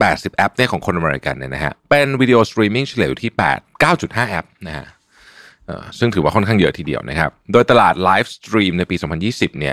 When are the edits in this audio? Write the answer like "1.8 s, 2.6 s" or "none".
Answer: 1.8 s

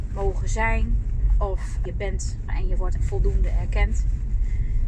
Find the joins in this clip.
1.9 s, 2.5 s, 3.0 s

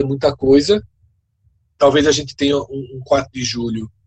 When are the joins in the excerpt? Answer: none

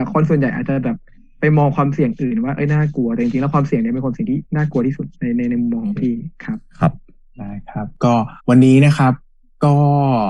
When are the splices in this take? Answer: 4.5 s, 5.1 s, 8.4 s

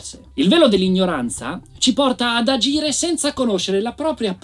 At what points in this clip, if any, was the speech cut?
none

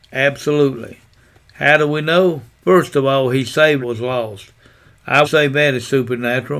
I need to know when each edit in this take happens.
2.5 s, 3.8 s, 5.2 s

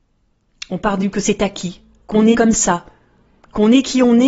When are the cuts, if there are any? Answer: 1.1 s, 2.3 s

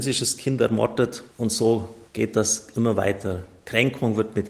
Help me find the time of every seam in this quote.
1.3 s, 2.1 s

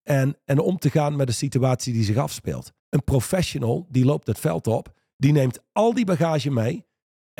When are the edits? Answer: 2.8 s

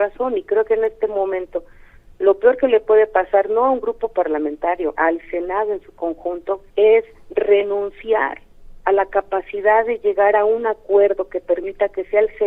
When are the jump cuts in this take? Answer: 6.7 s

